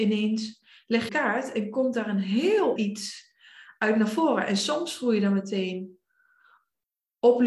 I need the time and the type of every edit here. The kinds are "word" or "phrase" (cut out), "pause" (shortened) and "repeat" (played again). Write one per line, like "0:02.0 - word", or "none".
0:01.1 - phrase
0:02.8 - word

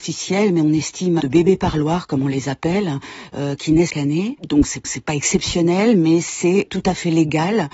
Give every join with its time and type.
0:01.2 - phrase
0:03.9 - word
0:04.8 - repeat
0:06.7 - word

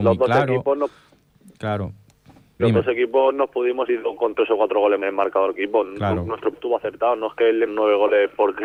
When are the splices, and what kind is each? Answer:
0:02.6 - word
0:03.9 - word
0:05.0 - word
0:05.5 - word
0:06.5 - word
0:07.7 - word

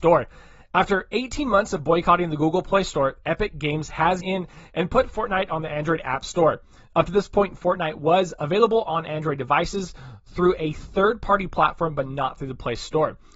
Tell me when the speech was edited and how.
0:04.2 - word

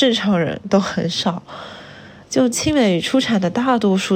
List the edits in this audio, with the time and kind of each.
none

